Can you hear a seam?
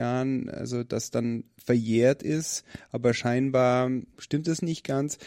no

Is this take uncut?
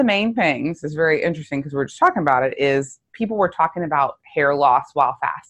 yes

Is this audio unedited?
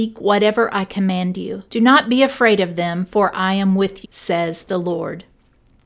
no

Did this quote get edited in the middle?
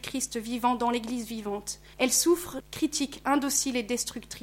yes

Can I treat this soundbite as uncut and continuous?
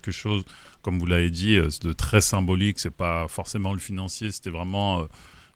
yes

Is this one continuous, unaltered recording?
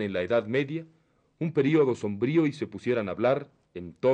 yes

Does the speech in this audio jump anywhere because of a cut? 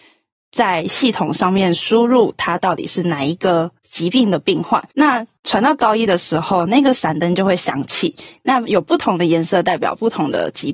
yes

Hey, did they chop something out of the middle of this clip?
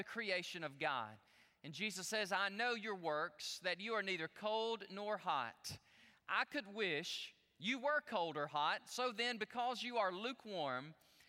no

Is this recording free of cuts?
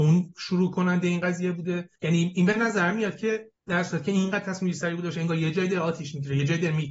no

